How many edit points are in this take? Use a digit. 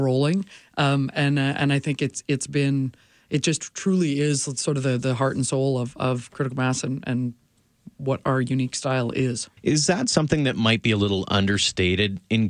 1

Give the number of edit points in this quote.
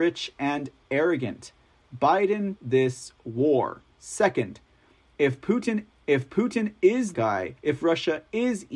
5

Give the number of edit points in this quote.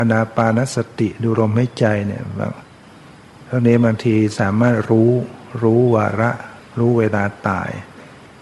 1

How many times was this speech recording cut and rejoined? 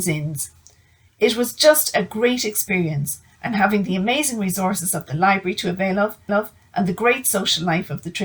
1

